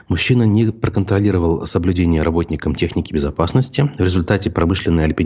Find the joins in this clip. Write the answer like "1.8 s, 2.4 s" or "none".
none